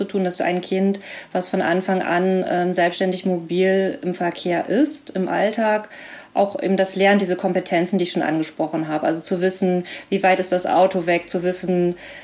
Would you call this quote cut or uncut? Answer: uncut